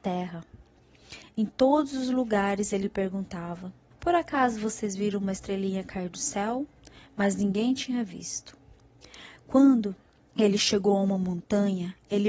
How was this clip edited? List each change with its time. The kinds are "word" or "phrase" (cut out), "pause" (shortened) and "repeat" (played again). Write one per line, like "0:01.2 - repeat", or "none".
0:03.9 - pause
0:10.1 - pause